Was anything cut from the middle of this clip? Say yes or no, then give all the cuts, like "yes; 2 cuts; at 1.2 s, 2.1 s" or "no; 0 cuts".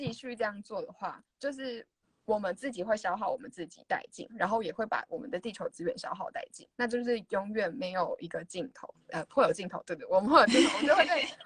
yes; 2 cuts; at 1.3 s, 2.0 s